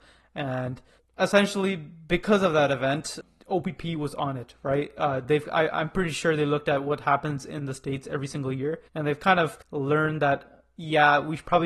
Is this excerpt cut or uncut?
cut